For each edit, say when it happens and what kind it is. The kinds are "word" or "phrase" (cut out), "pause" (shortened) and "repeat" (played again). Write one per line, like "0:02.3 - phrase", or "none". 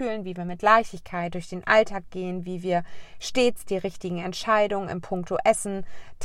none